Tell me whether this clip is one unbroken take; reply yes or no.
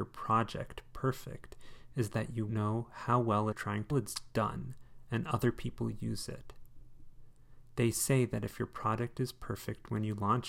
no